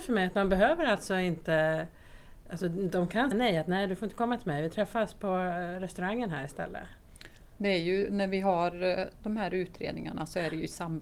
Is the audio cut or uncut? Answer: cut